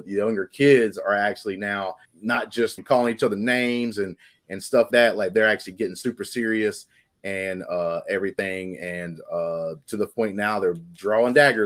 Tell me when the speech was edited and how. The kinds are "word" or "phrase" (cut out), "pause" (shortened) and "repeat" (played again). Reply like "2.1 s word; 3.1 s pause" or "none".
2.0 s pause; 2.8 s phrase; 4.9 s word